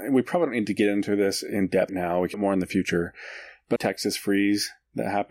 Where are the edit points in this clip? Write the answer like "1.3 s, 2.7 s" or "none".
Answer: 1.9 s, 2.3 s, 3.8 s